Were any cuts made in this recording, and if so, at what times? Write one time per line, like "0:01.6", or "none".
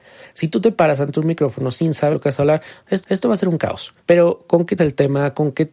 0:02.1
0:03.0
0:04.0
0:04.8